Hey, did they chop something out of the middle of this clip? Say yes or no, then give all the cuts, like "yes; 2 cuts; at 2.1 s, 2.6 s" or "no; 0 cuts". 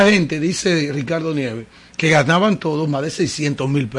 no; 0 cuts